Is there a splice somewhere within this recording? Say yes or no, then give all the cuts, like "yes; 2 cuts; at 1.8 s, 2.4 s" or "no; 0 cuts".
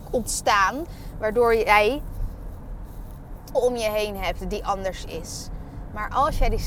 yes; 1 cut; at 3.5 s